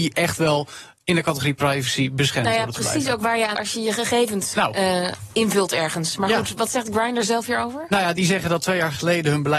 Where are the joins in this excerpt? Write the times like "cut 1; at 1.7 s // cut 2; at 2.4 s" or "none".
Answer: cut 1; at 3.5 s // cut 2; at 4.5 s